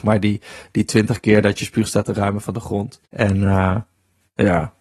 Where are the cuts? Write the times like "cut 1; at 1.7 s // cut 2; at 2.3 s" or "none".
cut 1; at 3.1 s